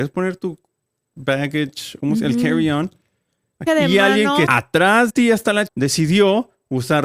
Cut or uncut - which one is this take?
cut